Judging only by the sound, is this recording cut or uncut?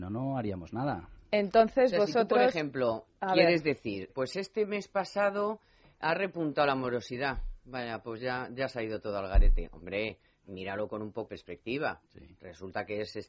cut